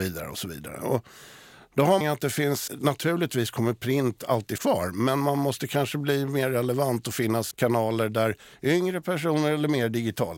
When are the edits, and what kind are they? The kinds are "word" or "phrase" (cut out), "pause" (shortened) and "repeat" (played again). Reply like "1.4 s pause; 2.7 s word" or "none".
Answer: 2.0 s phrase; 2.7 s word; 4.6 s word; 7.5 s word

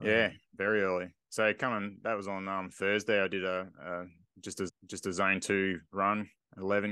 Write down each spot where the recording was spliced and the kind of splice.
4.7 s repeat

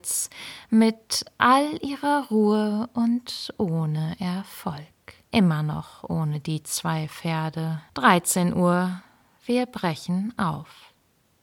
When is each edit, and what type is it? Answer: 5.2 s pause; 7.9 s pause

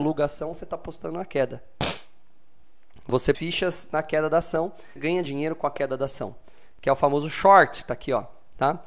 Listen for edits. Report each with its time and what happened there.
3.3 s phrase; 5.0 s phrase

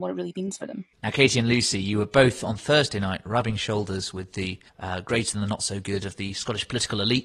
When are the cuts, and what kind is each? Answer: 0.9 s pause; 4.7 s pause

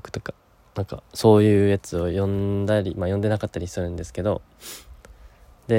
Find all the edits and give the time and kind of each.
none

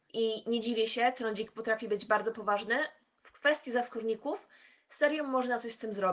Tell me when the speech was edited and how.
none

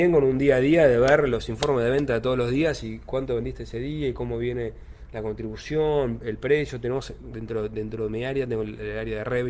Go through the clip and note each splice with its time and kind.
none

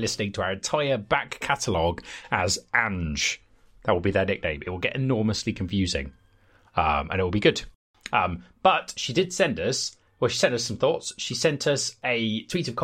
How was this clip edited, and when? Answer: none

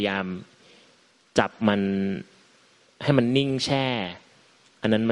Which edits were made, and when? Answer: none

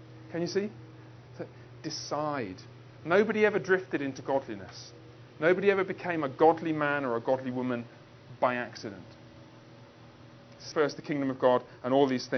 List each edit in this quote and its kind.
10.7 s word

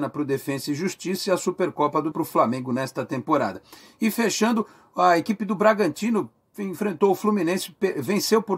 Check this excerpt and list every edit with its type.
2.1 s word

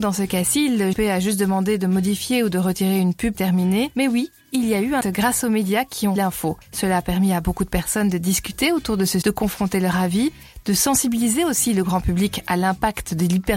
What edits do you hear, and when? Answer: 0.9 s word; 3.3 s word; 5.0 s word; 6.2 s word; 9.2 s word

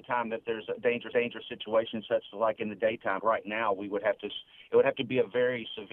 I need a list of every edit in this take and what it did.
1.1 s repeat; 3.2 s word

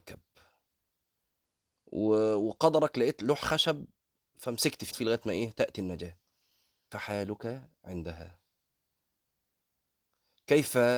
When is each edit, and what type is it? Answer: 4.9 s word; 6.9 s word

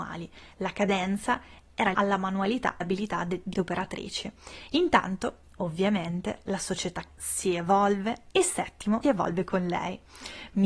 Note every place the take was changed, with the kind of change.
1.9 s phrase; 2.8 s word; 3.5 s word; 7.1 s word; 9.0 s word

